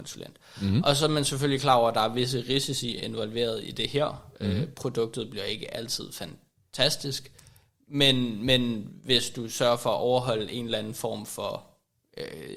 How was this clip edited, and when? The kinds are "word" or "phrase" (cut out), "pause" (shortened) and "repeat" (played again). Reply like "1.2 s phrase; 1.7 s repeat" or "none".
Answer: none

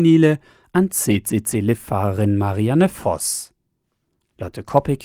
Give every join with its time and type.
none

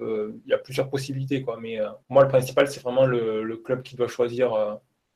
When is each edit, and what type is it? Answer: 2.0 s pause

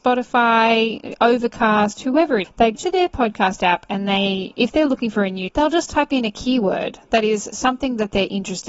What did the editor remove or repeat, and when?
2.4 s word; 2.7 s word; 5.5 s word

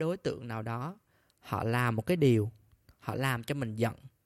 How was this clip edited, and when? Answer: none

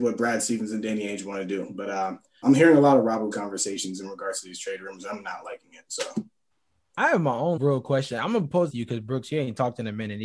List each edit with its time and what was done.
2.4 s word; 3.3 s word; 6.5 s pause; 7.6 s word; 8.7 s phrase

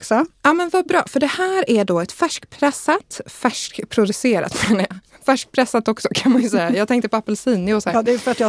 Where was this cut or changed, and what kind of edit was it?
none

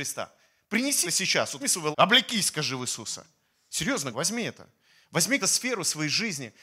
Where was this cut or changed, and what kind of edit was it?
1.0 s word; 1.6 s word; 1.9 s word; 4.1 s word; 5.4 s word

